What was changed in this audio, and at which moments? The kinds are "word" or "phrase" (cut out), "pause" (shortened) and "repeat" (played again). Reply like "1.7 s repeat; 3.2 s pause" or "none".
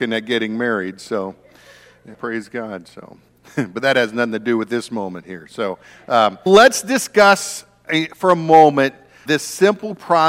2.1 s word; 3.3 s pause; 6.5 s word; 9.3 s word